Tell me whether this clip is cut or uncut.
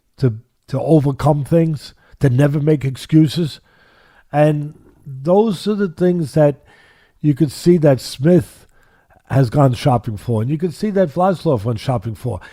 uncut